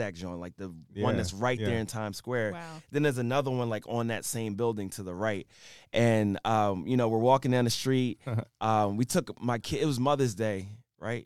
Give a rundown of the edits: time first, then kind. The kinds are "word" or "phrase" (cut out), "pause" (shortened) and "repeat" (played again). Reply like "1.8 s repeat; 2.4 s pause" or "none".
none